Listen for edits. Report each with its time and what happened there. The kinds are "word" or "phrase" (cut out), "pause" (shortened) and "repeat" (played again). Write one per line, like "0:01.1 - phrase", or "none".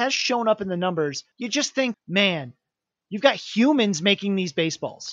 0:01.3 - pause
0:01.9 - word